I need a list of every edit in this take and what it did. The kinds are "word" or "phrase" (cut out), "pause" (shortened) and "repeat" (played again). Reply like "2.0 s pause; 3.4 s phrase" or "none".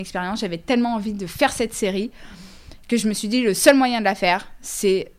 none